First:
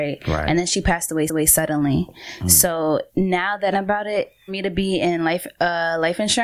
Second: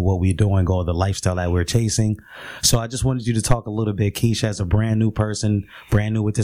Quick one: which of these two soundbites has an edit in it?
first; 4 cuts; at 1.3 s, 3.1 s, 3.7 s, 4.5 s

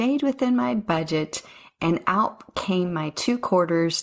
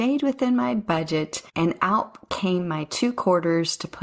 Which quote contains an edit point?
second; 1 cut; at 1.5 s

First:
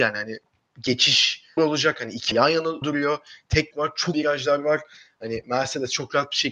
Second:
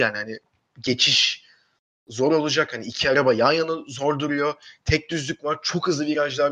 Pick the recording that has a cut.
first; 5 cuts; at 1.6 s, 2.3 s, 2.8 s, 3.7 s, 4.1 s

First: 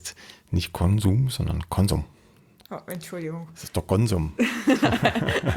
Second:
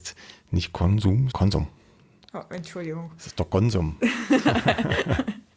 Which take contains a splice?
second; 1 cut; at 1.3 s

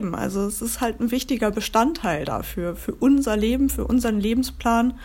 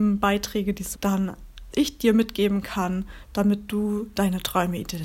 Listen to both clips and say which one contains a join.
second; 2 cuts; at 0.9 s, 1.7 s

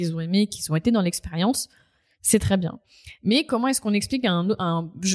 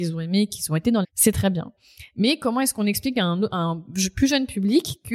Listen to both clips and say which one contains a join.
second; 1 cut; at 1.0 s

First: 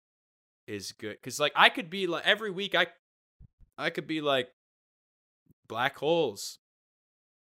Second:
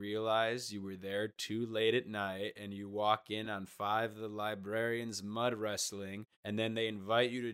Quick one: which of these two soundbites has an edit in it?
second; 1 cut; at 6.3 s

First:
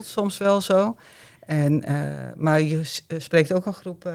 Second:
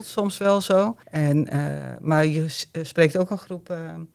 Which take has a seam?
second; 1 cut; at 1.0 s

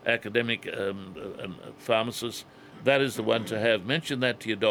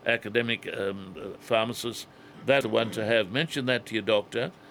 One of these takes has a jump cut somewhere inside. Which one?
second; 2 cuts; at 1.4 s, 2.6 s

